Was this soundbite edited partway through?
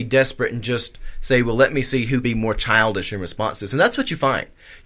yes; 1 cut; at 2.2 s

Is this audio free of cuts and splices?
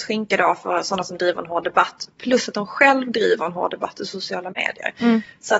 yes; 0 cuts

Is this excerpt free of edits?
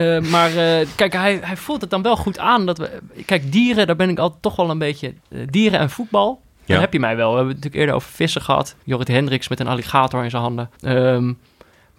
no; 3 cuts; at 5.2 s, 8.8 s, 10.7 s

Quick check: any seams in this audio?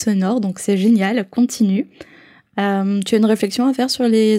no; 0 cuts

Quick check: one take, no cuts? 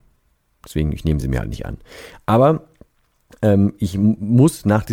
yes; 0 cuts

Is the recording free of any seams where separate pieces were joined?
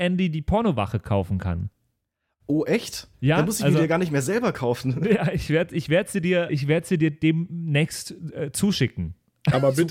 no; 1 cut; at 6.5 s

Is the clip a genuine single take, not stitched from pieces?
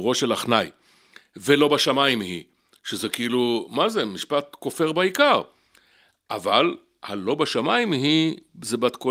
yes; 0 cuts

